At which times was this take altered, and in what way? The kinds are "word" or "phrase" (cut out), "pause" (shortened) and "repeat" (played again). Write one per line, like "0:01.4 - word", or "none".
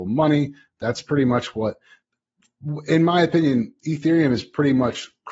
none